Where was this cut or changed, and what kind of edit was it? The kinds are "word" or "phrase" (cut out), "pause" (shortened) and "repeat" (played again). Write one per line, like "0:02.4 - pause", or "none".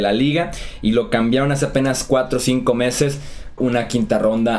0:03.6 - word